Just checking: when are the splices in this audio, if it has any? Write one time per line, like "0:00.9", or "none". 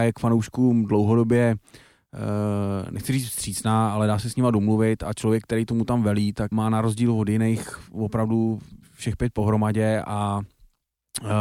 0:06.5